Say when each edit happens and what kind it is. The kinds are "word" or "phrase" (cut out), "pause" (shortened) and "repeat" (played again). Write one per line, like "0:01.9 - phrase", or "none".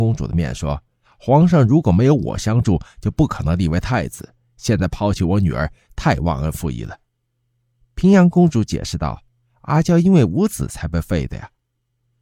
none